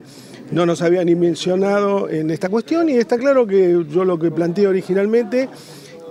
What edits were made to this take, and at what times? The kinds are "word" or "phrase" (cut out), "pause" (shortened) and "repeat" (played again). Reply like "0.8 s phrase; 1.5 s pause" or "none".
none